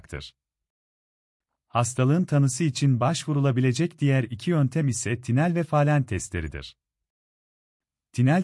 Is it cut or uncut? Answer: uncut